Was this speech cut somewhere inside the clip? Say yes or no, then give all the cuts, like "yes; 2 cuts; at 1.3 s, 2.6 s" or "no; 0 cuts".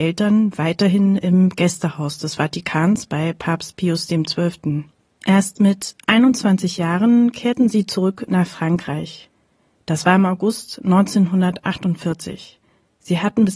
no; 0 cuts